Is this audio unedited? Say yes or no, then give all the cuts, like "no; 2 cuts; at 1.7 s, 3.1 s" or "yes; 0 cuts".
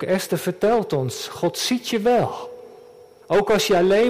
yes; 0 cuts